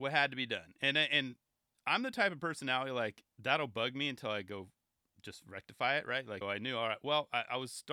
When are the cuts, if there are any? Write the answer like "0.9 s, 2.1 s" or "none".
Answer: 6.4 s